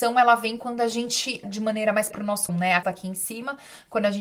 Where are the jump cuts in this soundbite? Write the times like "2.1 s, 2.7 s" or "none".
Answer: 1.4 s, 2.1 s, 2.5 s, 2.8 s